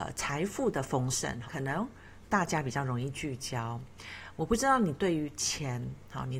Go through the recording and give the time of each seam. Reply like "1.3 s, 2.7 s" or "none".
1.5 s